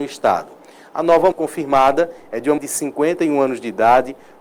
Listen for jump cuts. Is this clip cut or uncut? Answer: cut